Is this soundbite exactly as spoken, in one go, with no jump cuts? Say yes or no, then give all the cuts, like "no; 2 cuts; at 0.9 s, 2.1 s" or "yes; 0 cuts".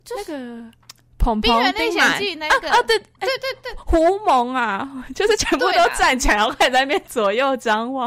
yes; 0 cuts